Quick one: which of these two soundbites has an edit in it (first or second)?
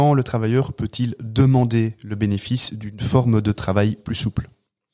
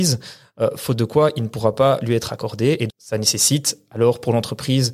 second